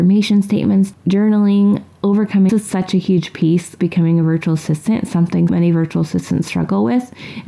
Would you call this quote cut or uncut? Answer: cut